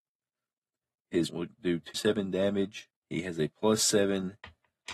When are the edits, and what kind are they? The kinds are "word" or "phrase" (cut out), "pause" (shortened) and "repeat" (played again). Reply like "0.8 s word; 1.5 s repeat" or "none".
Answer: 1.3 s word; 1.9 s word; 3.0 s pause